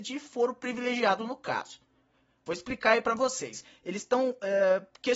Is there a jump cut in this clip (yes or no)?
no